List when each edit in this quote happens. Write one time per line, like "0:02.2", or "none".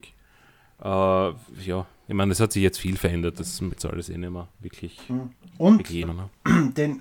0:03.7
0:04.5
0:05.5
0:06.0